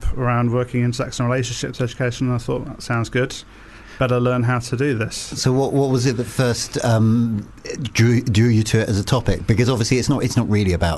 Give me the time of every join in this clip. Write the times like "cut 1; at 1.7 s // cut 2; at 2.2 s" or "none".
none